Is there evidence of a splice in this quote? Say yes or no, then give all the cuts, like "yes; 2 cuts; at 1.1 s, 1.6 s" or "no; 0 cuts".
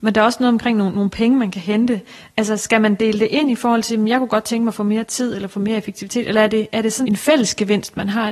yes; 1 cut; at 7.0 s